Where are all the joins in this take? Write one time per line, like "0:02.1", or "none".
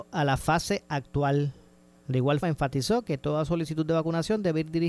0:02.4